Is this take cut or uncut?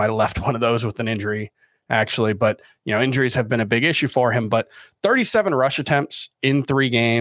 uncut